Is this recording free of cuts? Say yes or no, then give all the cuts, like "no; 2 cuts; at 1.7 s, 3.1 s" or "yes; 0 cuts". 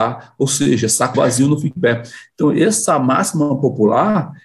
no; 2 cuts; at 1.1 s, 1.8 s